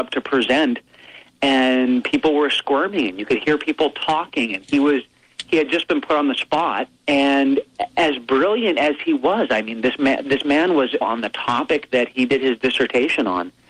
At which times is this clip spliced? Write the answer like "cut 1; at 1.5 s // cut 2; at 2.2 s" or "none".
cut 1; at 7.0 s // cut 2; at 11.0 s